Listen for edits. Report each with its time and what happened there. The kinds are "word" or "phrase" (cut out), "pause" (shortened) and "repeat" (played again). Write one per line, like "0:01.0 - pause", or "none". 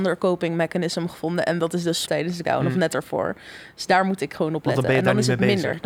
0:02.0 - word
0:02.4 - word